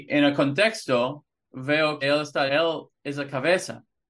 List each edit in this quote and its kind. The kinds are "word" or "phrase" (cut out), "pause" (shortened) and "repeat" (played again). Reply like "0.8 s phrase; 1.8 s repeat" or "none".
2.0 s word; 2.5 s word; 3.0 s pause